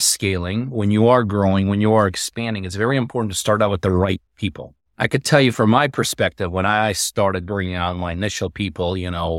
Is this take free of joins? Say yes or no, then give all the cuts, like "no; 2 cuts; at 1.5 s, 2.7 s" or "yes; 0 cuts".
no; 1 cut; at 4.3 s